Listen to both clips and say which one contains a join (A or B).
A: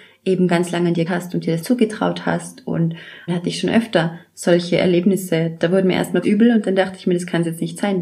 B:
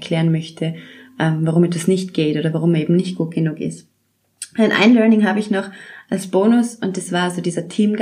A